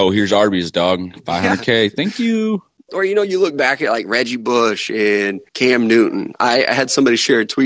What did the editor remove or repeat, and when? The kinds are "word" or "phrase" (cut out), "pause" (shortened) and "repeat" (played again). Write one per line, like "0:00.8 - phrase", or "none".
0:05.5 - pause